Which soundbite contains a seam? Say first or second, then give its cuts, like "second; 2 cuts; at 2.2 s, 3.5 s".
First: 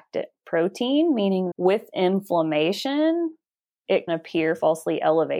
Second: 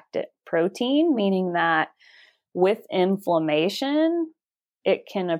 first; 2 cuts; at 1.5 s, 4.1 s